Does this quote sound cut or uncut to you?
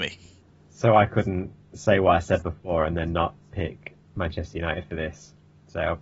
cut